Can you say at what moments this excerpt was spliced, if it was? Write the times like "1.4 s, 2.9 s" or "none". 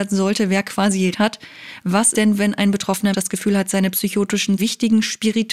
1.1 s, 2.1 s, 3.1 s, 4.6 s